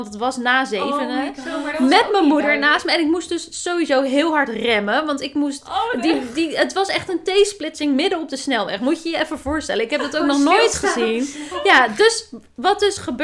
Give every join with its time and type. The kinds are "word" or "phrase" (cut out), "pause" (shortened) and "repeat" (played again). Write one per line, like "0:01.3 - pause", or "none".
none